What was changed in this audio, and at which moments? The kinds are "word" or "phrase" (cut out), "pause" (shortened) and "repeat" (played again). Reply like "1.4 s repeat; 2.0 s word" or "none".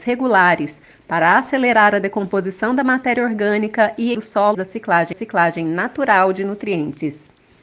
4.1 s word; 4.5 s word; 5.1 s repeat